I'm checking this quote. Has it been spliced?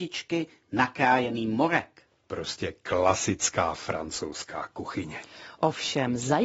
no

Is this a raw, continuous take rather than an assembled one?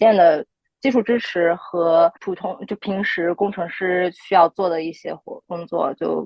no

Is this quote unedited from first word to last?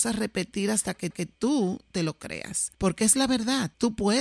no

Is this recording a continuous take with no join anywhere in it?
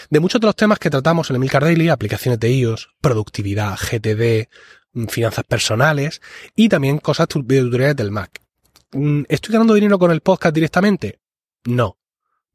yes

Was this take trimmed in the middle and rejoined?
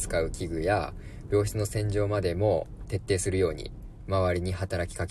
no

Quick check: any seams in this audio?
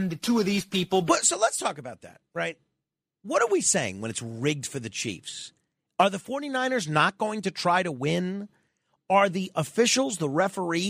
no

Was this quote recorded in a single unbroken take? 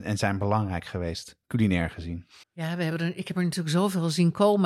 no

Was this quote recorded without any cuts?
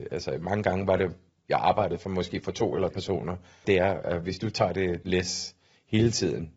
no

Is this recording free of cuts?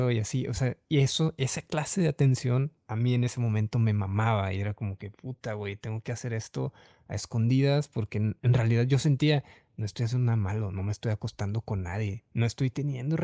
yes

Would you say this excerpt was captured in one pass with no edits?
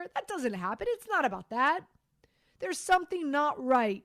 yes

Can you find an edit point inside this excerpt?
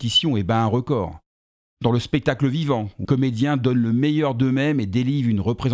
yes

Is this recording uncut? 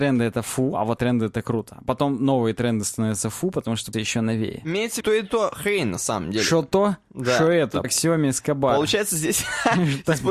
no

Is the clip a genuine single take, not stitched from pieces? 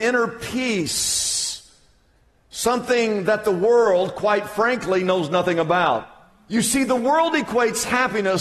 yes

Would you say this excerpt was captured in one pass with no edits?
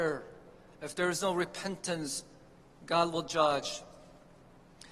yes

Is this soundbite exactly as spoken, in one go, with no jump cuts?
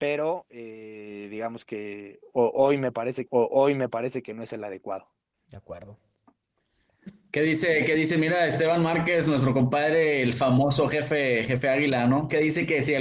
no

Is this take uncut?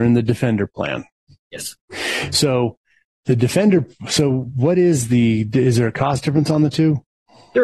yes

